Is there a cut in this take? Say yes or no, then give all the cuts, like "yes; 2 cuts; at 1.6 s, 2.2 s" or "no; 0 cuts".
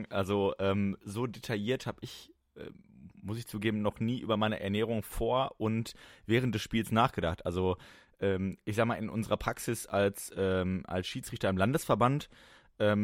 no; 0 cuts